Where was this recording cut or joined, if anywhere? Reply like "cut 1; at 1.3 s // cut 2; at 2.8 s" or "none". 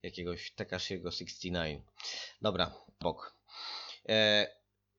cut 1; at 3.0 s